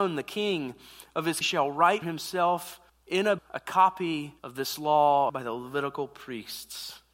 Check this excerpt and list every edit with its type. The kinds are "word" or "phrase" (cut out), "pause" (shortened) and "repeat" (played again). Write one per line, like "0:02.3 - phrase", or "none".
0:01.4 - phrase
0:02.0 - word
0:02.9 - pause
0:03.4 - word
0:04.4 - pause
0:05.3 - word